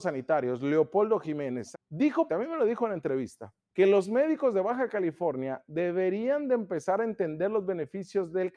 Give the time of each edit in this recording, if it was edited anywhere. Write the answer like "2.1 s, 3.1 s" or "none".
1.7 s, 2.3 s, 3.6 s

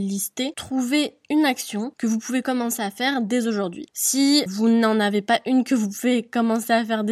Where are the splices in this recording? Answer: 4.5 s

